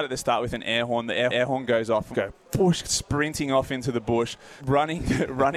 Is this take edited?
yes; 4 cuts; at 1.3 s, 2.1 s, 2.8 s, 4.6 s

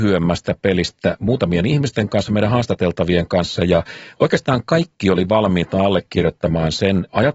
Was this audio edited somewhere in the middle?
no; 0 cuts

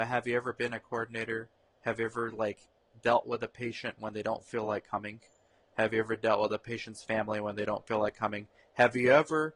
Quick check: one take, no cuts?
yes; 0 cuts

